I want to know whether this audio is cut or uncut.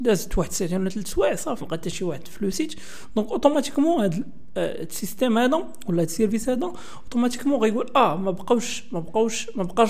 cut